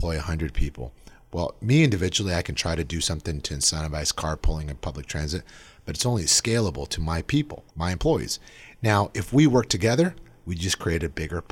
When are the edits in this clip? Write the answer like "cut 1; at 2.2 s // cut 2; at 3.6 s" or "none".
cut 1; at 7.7 s